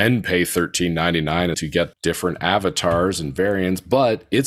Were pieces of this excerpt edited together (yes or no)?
yes